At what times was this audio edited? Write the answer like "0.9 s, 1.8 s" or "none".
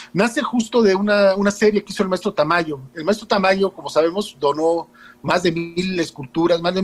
none